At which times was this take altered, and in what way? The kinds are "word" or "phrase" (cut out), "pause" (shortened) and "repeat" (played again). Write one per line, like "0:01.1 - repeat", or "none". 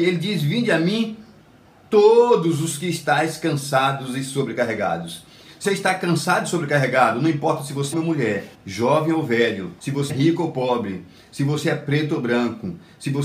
0:05.6 - word
0:07.9 - phrase
0:08.5 - pause
0:09.8 - pause
0:10.1 - word